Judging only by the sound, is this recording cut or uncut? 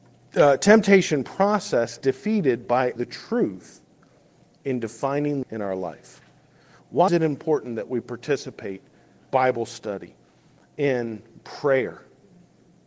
cut